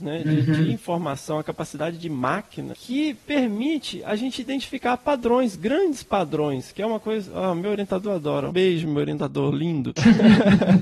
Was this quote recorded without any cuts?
no; 2 cuts; at 2.7 s, 8.5 s

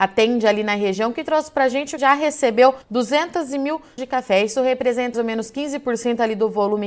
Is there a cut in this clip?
yes; 4 cuts; at 2.0 s, 2.8 s, 4.0 s, 5.1 s

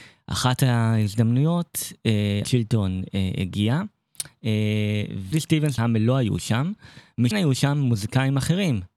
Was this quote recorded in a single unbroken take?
no; 4 cuts; at 2.4 s, 5.3 s, 5.8 s, 7.3 s

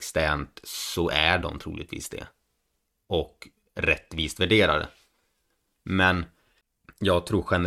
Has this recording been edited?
no; 0 cuts

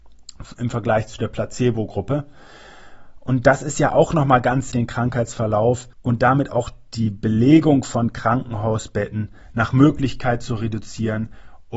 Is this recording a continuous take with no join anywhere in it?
no; 2 cuts; at 4.7 s, 5.9 s

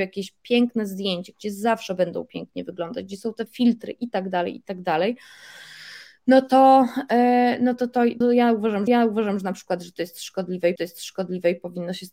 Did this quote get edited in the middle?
yes; 4 cuts; at 3.5 s, 8.2 s, 8.9 s, 10.8 s

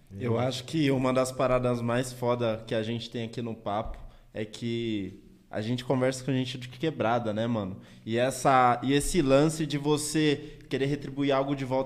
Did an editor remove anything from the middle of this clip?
no; 0 cuts

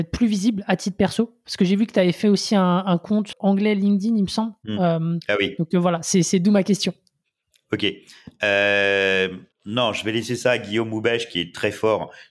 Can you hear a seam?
yes; 2 cuts; at 3.3 s, 9.5 s

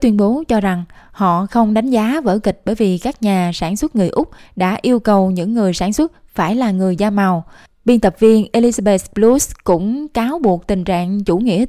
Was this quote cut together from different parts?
no; 0 cuts

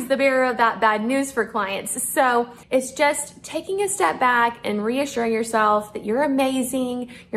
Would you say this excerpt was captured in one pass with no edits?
no; 1 cut; at 2.6 s

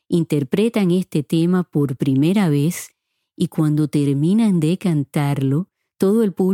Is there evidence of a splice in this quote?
no; 0 cuts

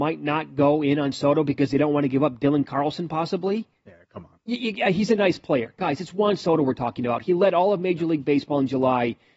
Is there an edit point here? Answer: no; 0 cuts

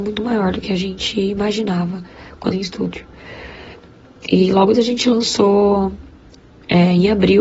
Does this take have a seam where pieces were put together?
yes; 2 cuts; at 2.5 s, 4.7 s

